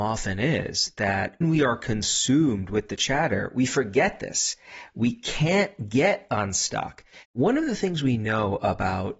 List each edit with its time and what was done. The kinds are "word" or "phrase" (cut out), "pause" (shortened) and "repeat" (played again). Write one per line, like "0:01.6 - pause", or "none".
0:01.4 - word
0:07.2 - pause

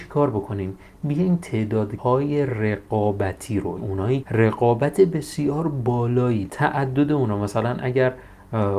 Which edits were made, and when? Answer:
0:02.0 - word
0:03.8 - word
0:04.2 - word
0:06.5 - word

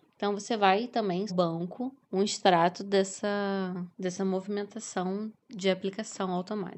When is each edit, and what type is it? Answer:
0:01.3 - phrase
0:02.0 - pause
0:03.9 - pause
0:05.4 - pause

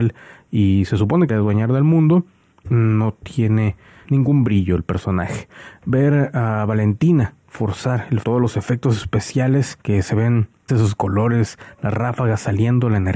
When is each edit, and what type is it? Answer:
0:01.3 - phrase
0:02.6 - word
0:04.0 - word
0:08.2 - phrase
0:09.8 - pause
0:10.7 - word

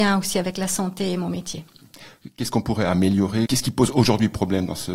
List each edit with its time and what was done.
0:03.5 - phrase

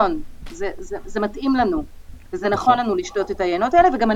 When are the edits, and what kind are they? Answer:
none

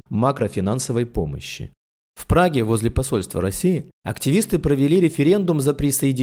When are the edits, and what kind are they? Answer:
none

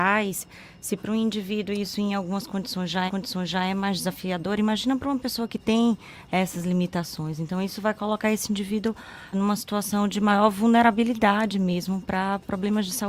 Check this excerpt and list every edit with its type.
0:03.1 - repeat
0:09.3 - word

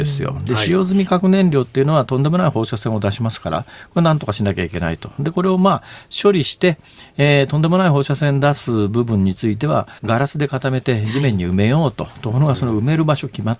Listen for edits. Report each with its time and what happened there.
0:10.0 - pause

